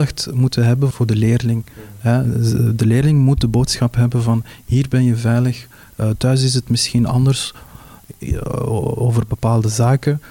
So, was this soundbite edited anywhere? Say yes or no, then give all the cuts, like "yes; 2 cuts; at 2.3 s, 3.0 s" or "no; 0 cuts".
yes; 1 cut; at 0.9 s